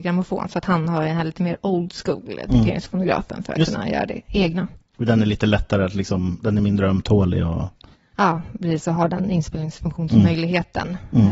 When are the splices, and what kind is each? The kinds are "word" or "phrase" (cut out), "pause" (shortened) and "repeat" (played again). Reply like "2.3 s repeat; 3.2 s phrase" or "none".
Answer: none